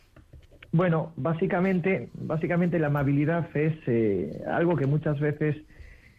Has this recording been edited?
no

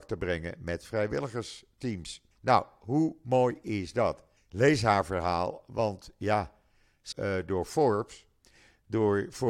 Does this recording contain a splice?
yes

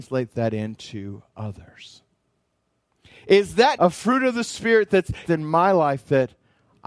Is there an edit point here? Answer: yes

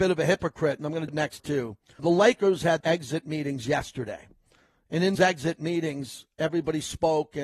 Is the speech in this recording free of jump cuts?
no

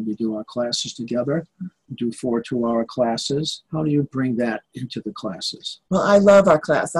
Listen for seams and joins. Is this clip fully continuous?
no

